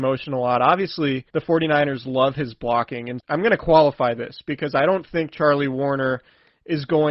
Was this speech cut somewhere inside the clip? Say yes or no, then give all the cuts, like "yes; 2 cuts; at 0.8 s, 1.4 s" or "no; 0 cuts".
yes; 2 cuts; at 1.3 s, 3.2 s